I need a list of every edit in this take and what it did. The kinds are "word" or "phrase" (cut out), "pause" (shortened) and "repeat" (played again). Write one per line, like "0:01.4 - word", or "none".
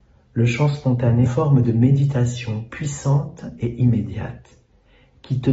0:01.3 - phrase